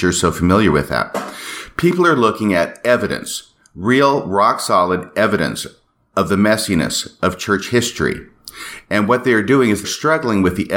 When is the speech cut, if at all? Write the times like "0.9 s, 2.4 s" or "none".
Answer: 9.8 s